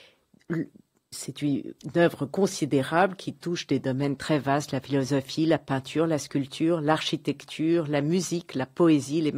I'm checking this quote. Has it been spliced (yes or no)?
yes